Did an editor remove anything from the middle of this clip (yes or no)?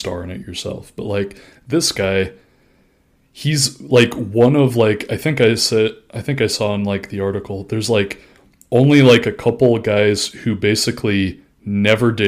no